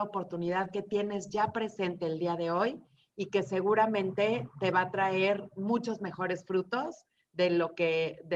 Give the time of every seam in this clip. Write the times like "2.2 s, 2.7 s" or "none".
none